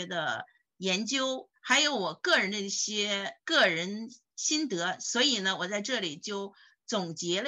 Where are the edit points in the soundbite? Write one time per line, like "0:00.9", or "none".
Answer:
0:01.6
0:03.4